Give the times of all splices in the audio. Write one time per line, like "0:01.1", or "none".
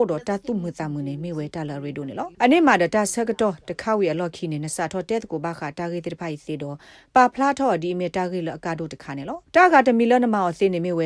0:02.3
0:09.5